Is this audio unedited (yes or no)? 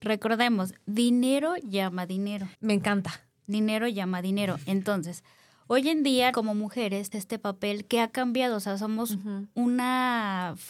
no